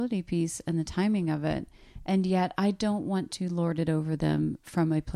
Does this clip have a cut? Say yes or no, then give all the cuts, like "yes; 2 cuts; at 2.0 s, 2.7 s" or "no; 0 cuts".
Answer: no; 0 cuts